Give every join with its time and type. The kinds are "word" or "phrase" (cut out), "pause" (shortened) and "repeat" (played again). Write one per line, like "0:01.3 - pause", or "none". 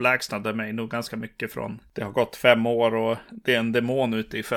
none

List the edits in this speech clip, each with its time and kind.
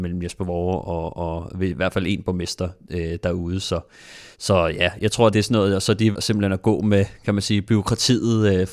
0:04.3 - pause
0:05.3 - word
0:06.1 - word

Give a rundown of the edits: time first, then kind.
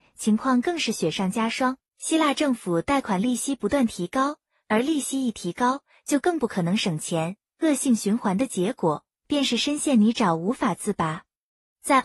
0:01.9 - pause

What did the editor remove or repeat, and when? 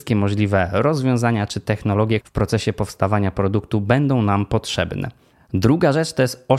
0:02.2 - word

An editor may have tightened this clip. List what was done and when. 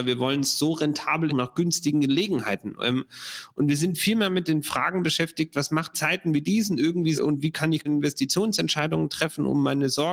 0:01.3 - phrase
0:05.9 - phrase
0:07.2 - word
0:07.9 - word

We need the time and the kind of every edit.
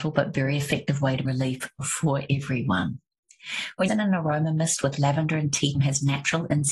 0:01.2 - word
0:03.9 - word
0:05.7 - phrase

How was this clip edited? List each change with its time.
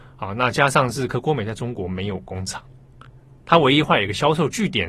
none

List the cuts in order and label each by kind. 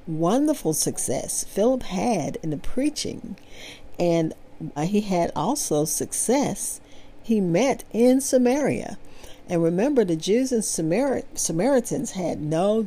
0:04.8 - word
0:07.2 - phrase

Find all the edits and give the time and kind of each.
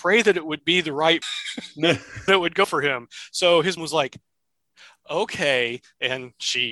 0:01.2 - word
0:02.3 - word
0:02.6 - word
0:03.8 - word

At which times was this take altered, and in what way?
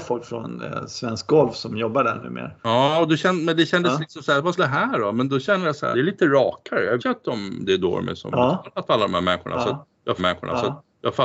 0:02.6 - pause
0:04.6 - phrase
0:05.9 - phrase
0:07.0 - word
0:10.2 - repeat

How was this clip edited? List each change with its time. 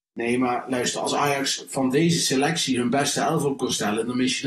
none

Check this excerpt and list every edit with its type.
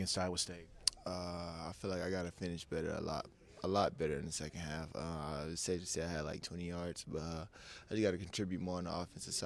0:06.4 - word

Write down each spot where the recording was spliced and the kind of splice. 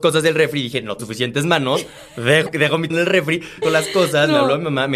0:01.0 - word
0:02.5 - word
0:02.9 - word
0:03.6 - word

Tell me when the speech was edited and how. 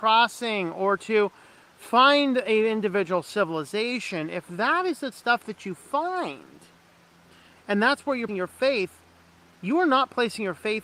0:05.1 - phrase
0:08.3 - word

